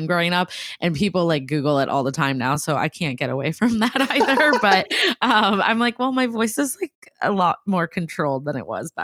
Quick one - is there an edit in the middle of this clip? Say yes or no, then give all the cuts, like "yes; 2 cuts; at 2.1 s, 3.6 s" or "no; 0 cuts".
no; 0 cuts